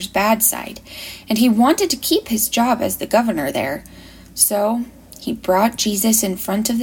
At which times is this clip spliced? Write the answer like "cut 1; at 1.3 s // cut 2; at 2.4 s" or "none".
none